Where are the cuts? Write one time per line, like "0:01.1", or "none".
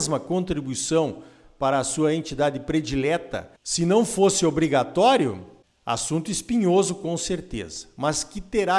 none

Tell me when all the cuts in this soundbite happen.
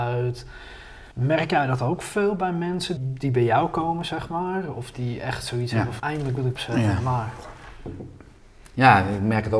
0:01.1
0:03.0
0:04.9
0:06.0
0:06.6

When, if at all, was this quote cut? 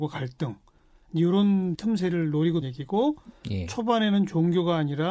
0:01.7
0:02.6

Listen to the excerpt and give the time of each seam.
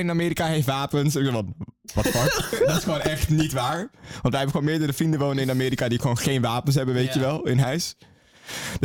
none

